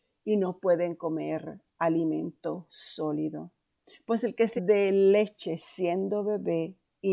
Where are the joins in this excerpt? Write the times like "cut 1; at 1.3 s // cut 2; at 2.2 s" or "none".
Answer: cut 1; at 3.7 s // cut 2; at 4.6 s